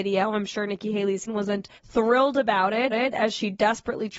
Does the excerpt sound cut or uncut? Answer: cut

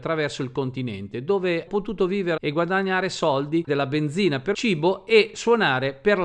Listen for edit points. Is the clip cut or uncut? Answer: cut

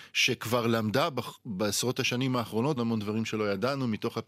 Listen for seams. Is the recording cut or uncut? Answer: cut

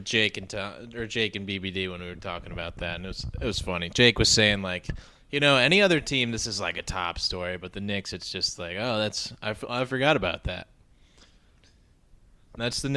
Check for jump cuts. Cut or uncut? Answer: uncut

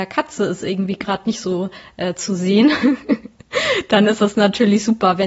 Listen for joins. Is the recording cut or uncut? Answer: uncut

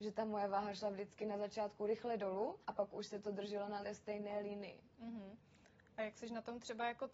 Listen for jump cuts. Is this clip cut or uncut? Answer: cut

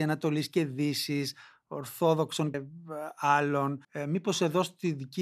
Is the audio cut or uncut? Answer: cut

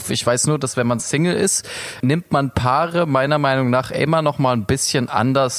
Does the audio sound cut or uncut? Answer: uncut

